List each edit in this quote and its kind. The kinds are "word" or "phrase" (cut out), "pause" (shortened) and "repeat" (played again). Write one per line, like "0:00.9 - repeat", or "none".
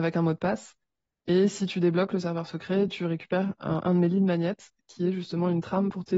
none